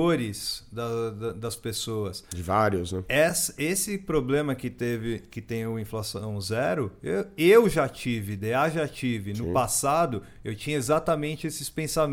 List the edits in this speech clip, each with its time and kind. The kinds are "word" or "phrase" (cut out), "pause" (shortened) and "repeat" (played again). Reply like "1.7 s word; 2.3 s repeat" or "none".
none